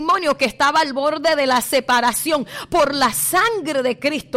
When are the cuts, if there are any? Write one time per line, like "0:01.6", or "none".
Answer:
none